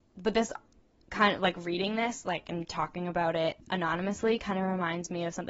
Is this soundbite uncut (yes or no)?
yes